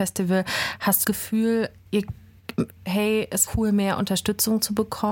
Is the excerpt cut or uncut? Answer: cut